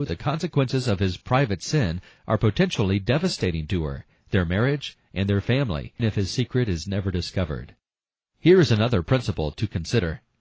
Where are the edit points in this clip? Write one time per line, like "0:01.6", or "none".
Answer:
0:06.0